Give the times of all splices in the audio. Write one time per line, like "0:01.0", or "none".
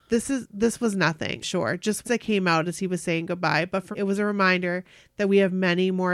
0:01.4
0:02.0
0:03.9